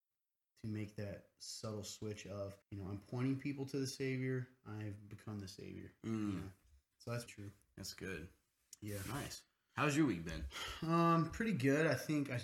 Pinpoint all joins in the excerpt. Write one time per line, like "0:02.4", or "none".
0:02.6
0:07.3